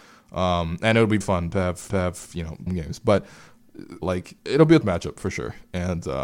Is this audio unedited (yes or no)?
no